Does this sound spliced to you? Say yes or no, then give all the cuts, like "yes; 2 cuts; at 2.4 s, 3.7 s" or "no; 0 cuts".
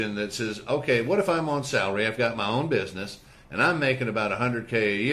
no; 0 cuts